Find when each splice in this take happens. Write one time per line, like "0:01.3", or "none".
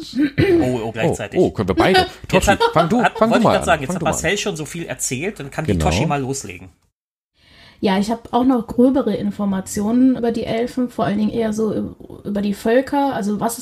0:00.9
0:10.2